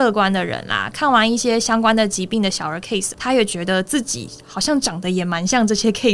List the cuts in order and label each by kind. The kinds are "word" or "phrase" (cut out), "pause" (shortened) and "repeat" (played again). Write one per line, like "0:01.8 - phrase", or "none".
0:03.1 - word